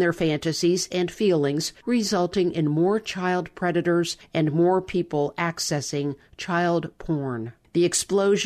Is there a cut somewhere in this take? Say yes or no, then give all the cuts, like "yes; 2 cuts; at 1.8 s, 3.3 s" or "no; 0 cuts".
no; 0 cuts